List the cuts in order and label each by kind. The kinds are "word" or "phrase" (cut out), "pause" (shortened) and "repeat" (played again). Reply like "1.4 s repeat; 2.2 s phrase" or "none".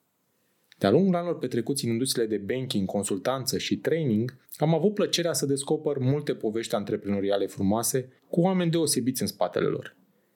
4.5 s pause; 8.2 s pause